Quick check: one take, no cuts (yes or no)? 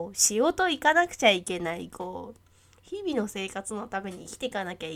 yes